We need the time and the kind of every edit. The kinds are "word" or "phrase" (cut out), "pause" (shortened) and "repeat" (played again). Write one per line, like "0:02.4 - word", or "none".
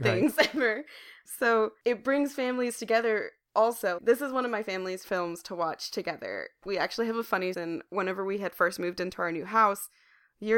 0:04.0 - word
0:05.0 - word
0:07.5 - phrase
0:07.9 - pause